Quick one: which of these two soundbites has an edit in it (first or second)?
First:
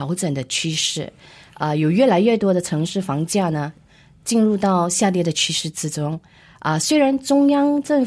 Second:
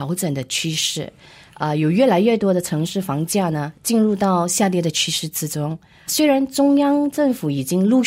second